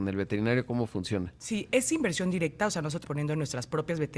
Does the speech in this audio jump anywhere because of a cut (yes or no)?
yes